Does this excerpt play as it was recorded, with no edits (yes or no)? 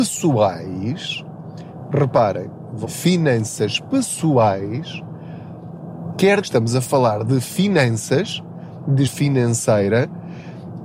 no